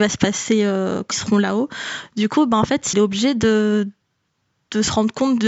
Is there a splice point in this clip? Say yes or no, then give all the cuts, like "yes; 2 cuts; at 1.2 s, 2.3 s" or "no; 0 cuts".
yes; 2 cuts; at 1.1 s, 2.9 s